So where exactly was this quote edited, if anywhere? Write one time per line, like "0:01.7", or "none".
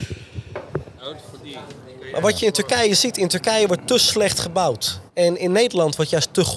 0:05.1